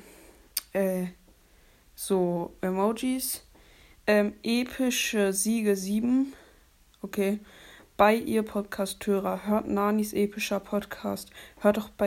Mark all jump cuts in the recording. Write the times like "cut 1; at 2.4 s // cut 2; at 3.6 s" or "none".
none